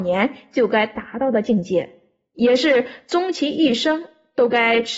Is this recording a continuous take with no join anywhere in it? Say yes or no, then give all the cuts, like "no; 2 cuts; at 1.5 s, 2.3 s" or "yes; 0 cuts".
yes; 0 cuts